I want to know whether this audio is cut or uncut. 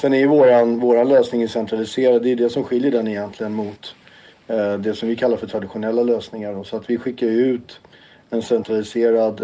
uncut